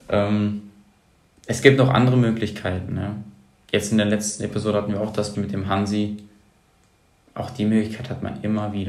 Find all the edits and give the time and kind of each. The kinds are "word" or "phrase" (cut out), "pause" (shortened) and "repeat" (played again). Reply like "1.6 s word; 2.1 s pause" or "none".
5.3 s word